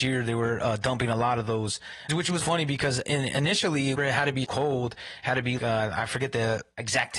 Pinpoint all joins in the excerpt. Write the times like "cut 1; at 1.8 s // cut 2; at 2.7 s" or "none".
cut 1; at 2.1 s // cut 2; at 2.4 s // cut 3; at 3.0 s // cut 4; at 4.0 s // cut 5; at 4.4 s // cut 6; at 5.6 s